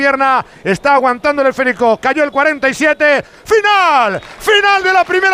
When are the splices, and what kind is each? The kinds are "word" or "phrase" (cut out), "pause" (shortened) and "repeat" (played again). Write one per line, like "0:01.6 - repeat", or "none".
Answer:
none